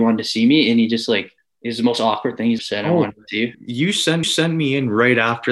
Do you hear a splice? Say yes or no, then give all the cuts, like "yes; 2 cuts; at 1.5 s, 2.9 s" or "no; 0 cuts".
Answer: yes; 4 cuts; at 1.4 s, 2.6 s, 3.5 s, 4.2 s